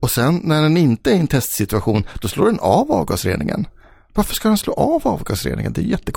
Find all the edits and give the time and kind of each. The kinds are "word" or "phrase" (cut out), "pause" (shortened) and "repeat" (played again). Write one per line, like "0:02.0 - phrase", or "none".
none